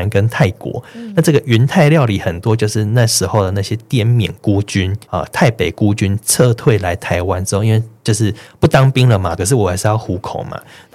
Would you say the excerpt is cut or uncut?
cut